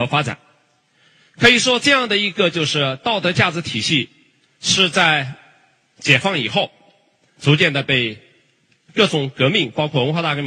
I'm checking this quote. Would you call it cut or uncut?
uncut